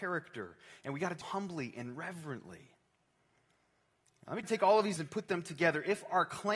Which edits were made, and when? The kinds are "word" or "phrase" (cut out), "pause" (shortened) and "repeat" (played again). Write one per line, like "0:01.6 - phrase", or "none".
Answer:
0:01.2 - word
0:04.4 - word
0:05.0 - word